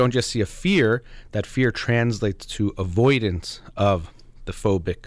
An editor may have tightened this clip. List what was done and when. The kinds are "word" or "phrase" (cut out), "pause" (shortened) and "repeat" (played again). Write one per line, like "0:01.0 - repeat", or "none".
none